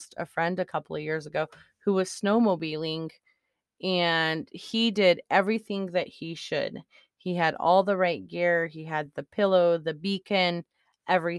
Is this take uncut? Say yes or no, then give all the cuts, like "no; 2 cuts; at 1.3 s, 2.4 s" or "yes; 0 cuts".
yes; 0 cuts